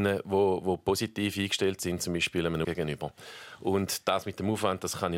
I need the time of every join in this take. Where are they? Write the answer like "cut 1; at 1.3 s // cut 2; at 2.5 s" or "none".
cut 1; at 2.6 s